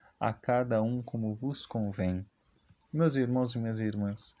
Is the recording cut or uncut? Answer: uncut